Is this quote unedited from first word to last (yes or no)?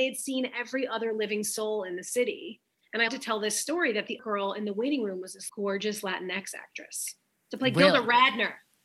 no